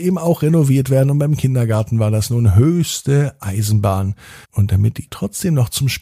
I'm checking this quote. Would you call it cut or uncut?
cut